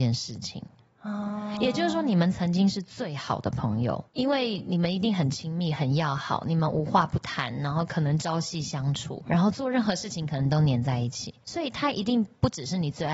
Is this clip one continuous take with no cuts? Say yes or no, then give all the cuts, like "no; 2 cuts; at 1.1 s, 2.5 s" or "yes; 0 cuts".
no; 3 cuts; at 4.1 s, 9.3 s, 11.4 s